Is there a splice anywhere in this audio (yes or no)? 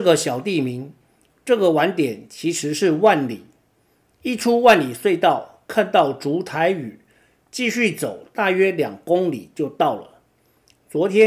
no